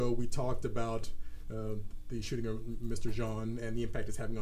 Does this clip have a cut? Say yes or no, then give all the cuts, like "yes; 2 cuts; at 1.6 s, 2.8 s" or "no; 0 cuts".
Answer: no; 0 cuts